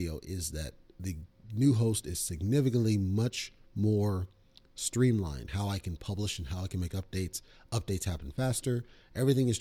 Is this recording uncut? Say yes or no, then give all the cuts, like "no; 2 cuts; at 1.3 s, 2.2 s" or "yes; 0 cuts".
no; 1 cut; at 5.5 s